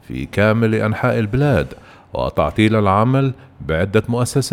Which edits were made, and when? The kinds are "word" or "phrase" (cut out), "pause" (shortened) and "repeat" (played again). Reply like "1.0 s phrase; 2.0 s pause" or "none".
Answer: none